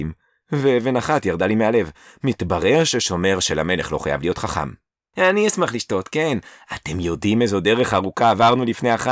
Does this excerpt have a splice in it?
no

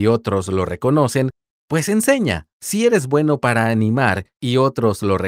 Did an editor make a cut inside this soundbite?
yes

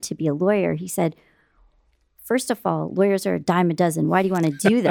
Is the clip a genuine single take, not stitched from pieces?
yes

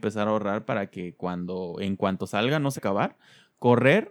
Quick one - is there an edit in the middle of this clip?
yes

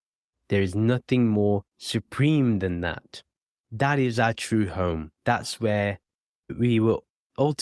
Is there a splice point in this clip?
yes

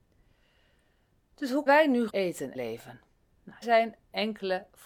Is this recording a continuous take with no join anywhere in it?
no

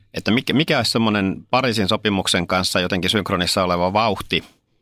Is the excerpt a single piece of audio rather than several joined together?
yes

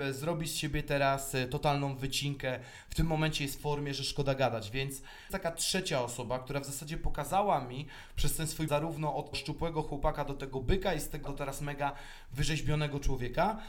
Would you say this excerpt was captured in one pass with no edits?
no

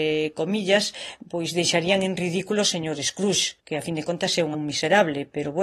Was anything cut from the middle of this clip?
yes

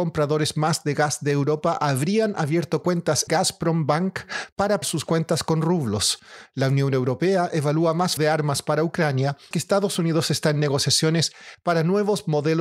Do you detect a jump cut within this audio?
yes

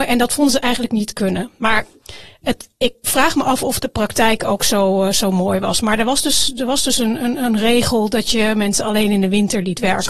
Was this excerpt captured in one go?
yes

